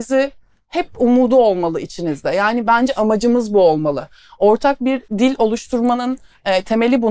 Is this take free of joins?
no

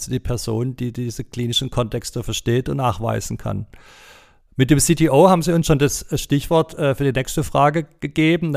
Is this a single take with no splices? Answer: yes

